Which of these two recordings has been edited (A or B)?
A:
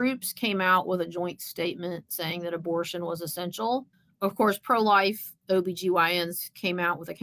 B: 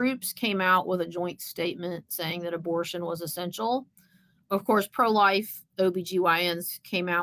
A